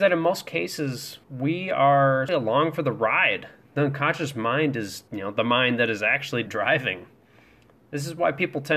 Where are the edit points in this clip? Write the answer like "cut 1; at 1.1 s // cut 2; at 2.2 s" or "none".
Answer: cut 1; at 1.2 s // cut 2; at 2.3 s // cut 3; at 5.1 s // cut 4; at 6.5 s